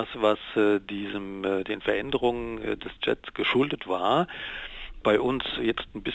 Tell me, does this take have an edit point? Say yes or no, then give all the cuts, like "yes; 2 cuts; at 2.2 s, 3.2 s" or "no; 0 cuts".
no; 0 cuts